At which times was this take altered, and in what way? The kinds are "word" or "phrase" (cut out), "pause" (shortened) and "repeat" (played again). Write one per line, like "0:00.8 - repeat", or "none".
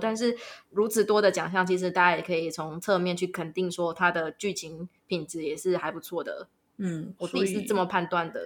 0:07.2 - phrase